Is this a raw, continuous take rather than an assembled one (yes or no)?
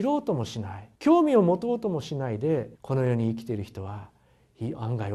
no